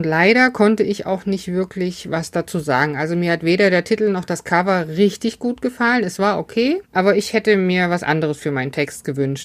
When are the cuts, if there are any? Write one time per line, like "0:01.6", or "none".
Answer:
0:06.8